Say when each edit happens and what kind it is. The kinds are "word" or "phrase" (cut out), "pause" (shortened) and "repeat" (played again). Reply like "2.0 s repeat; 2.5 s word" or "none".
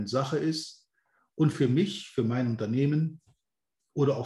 1.5 s word